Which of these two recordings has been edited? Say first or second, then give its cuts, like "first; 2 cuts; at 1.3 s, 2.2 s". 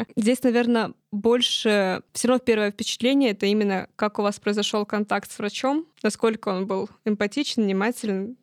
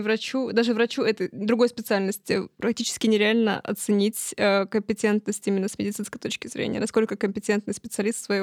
first; 1 cut; at 5.9 s